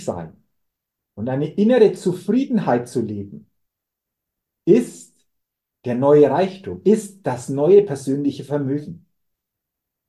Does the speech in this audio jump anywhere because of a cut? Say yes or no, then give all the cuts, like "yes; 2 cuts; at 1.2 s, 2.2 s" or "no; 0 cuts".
no; 0 cuts